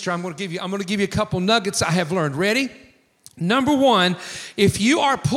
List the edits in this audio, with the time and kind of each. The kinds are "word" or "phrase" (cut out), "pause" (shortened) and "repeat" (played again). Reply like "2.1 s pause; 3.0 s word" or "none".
none